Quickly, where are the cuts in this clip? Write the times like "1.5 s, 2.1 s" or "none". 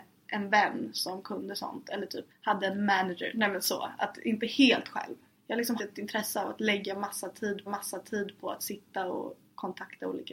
2.3 s, 5.3 s, 5.8 s, 7.7 s